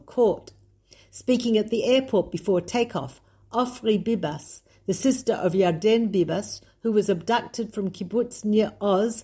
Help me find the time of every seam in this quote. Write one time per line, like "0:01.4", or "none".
none